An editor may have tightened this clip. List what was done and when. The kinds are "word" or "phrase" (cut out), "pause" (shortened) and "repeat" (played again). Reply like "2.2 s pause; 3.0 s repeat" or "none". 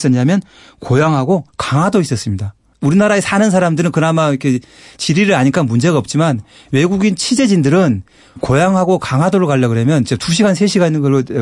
1.5 s pause; 8.4 s word